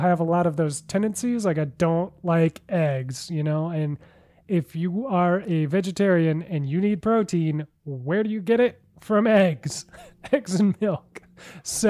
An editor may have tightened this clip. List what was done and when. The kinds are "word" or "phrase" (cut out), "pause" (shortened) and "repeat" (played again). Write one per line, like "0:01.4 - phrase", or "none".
none

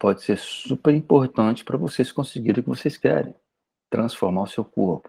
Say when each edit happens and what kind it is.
none

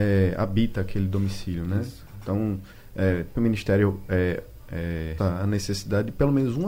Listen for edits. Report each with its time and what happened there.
0:03.3 - phrase
0:05.2 - word

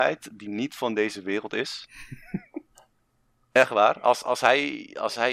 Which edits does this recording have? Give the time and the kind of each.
none

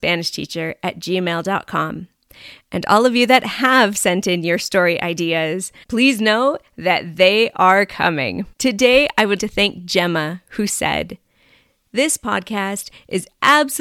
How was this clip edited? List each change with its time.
0:05.8 - pause
0:08.5 - pause
0:09.4 - word

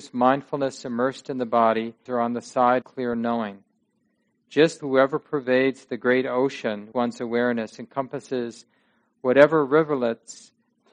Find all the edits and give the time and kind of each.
0:02.1 - phrase
0:02.8 - word
0:04.8 - word
0:06.9 - word

